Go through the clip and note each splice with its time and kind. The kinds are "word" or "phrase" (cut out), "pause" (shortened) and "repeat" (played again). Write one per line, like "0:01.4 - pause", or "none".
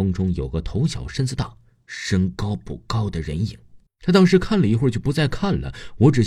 0:03.9 - pause